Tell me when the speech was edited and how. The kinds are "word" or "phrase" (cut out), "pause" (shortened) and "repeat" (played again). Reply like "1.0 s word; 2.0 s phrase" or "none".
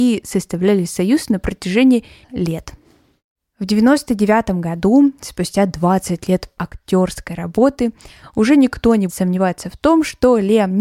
2.2 s word; 6.6 s word; 9.1 s word

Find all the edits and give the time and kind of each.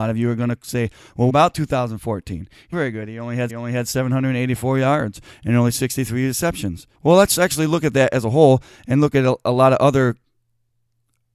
1.3 s word; 2.7 s phrase; 3.5 s repeat; 6.9 s pause

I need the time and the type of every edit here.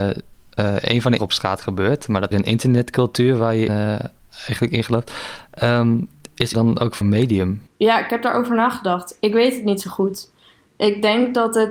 1.2 s phrase; 2.3 s phrase; 3.7 s word; 4.2 s pause; 6.5 s word; 7.0 s word; 7.7 s pause

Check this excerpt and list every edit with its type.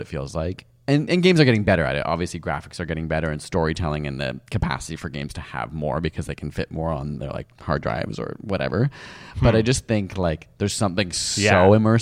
none

